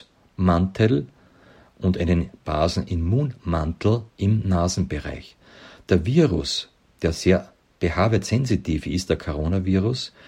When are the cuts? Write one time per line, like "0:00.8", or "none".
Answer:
0:04.1